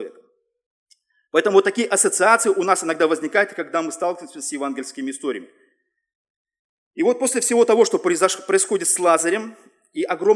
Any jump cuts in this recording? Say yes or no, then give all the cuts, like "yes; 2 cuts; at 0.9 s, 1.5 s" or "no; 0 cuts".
no; 0 cuts